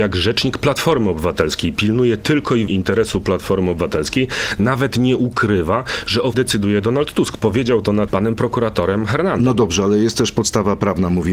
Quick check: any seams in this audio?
yes; 3 cuts; at 2.7 s, 6.3 s, 8.1 s

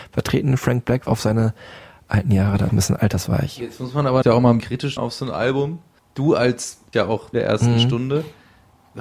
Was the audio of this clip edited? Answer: yes; 7 cuts; at 1.1 s, 2.7 s, 4.2 s, 4.6 s, 5.0 s, 6.9 s, 7.3 s

